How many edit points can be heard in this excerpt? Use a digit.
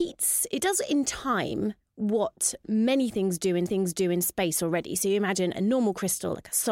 2